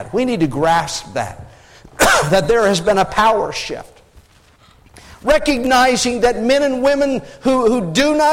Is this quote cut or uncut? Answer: uncut